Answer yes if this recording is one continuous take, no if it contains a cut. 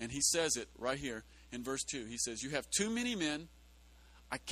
yes